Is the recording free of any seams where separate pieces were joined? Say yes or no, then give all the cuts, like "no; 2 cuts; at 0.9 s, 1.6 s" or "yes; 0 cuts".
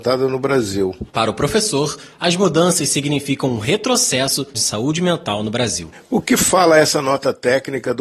no; 2 cuts; at 1.1 s, 4.5 s